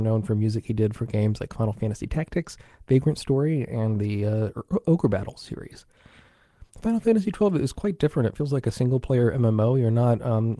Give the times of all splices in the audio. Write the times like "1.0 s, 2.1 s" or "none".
none